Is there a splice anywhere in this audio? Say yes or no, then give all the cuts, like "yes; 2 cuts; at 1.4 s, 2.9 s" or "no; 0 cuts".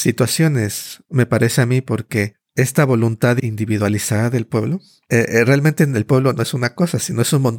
no; 0 cuts